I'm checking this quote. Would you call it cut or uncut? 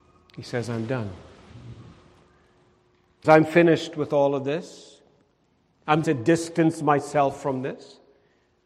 cut